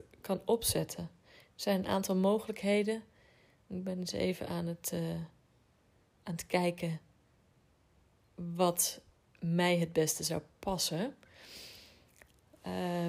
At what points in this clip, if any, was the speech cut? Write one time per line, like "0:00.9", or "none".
none